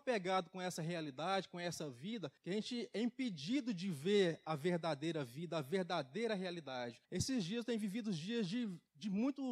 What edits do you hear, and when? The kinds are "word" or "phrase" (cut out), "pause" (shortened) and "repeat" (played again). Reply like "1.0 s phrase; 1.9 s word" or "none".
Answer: 2.4 s pause; 7.0 s pause